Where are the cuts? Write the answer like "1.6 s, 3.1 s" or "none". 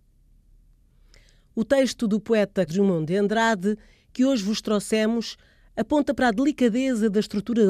2.7 s